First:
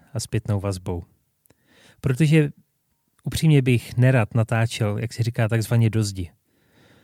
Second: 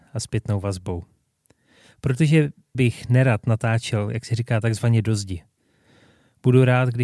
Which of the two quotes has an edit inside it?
second; 1 cut; at 2.7 s

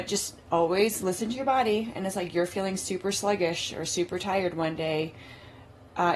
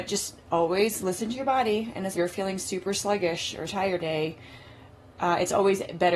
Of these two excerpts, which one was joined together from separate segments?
second; 3 cuts; at 2.1 s, 3.7 s, 4.0 s

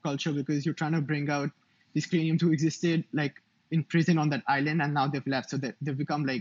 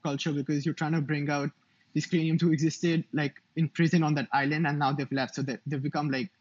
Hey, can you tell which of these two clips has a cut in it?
second; 1 cut; at 3.4 s

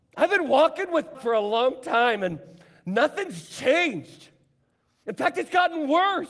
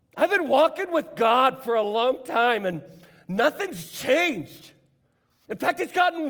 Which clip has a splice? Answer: first; 1 cut; at 1.1 s

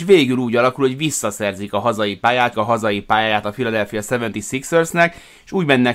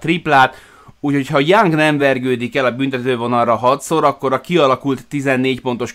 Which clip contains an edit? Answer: first; 1 cut; at 2.5 s

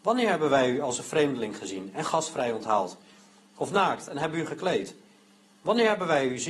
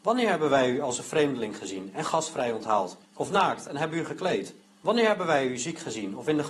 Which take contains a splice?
second; 2 cuts; at 3.0 s, 4.6 s

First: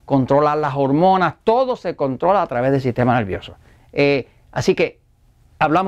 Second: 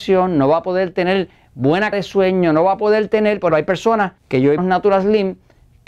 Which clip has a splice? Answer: second; 4 cuts; at 1.9 s, 3.5 s, 4.2 s, 4.6 s

